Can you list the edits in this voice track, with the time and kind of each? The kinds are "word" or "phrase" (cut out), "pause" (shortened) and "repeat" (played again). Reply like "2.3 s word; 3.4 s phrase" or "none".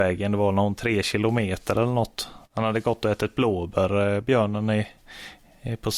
2.4 s pause